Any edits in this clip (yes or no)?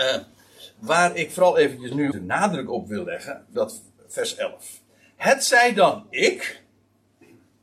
yes